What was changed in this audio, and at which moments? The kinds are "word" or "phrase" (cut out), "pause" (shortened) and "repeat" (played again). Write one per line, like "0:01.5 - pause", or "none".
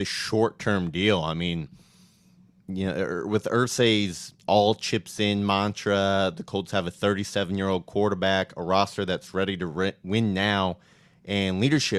none